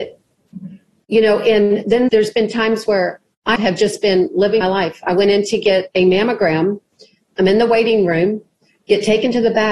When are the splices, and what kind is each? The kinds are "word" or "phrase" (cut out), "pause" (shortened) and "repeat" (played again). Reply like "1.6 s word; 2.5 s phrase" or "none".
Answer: 2.1 s word; 3.6 s word; 4.6 s word